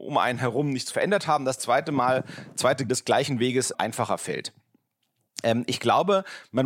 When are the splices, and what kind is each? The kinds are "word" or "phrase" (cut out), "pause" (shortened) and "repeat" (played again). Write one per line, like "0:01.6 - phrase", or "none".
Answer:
0:00.9 - word
0:01.6 - word
0:02.9 - word
0:03.7 - word